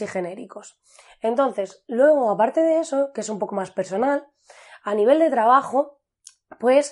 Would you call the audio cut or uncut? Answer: uncut